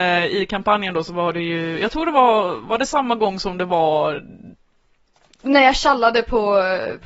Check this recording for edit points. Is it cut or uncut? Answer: uncut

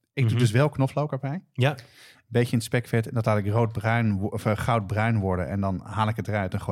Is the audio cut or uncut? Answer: uncut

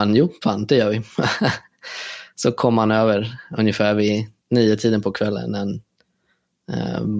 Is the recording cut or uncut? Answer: cut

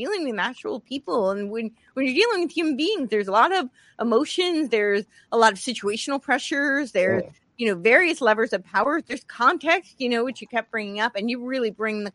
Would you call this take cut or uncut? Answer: uncut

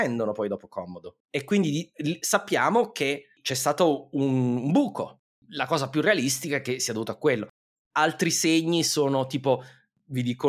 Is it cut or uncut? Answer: cut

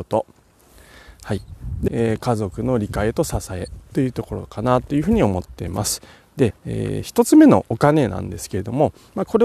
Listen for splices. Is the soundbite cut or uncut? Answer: cut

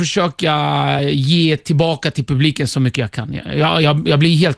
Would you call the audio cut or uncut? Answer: uncut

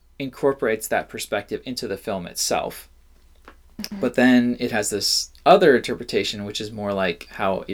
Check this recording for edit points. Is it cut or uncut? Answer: cut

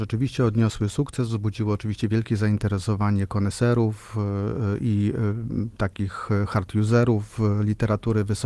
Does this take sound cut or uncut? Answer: uncut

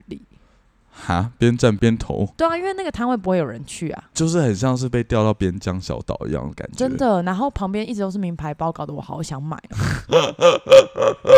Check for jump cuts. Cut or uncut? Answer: cut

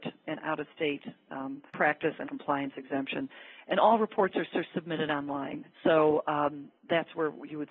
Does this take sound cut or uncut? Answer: cut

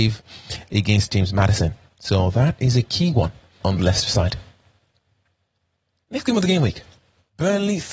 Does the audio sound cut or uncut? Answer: cut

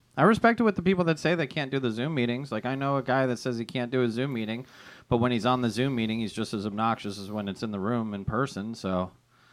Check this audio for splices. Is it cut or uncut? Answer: uncut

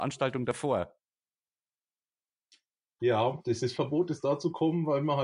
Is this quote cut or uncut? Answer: cut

